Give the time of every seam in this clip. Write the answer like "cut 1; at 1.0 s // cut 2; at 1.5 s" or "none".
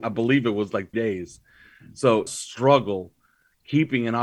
cut 1; at 0.9 s // cut 2; at 2.3 s

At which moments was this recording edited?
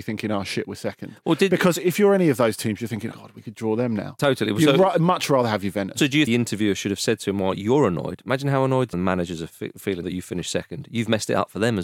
cut 1; at 3.1 s // cut 2; at 6.3 s // cut 3; at 8.9 s // cut 4; at 10.0 s

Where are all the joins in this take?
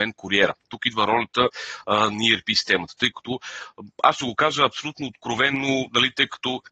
none

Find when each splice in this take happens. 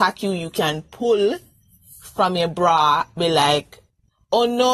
cut 1; at 3.2 s

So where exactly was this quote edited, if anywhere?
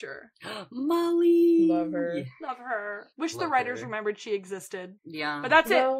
cut 1; at 3.1 s // cut 2; at 5.0 s

